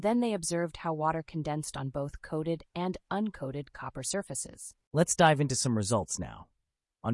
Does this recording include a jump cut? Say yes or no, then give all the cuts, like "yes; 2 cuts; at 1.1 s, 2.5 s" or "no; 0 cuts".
yes; 1 cut; at 4.8 s